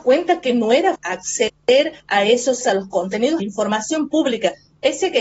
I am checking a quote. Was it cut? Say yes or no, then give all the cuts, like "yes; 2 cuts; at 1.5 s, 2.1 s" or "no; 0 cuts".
yes; 4 cuts; at 1.0 s, 2.0 s, 2.6 s, 3.4 s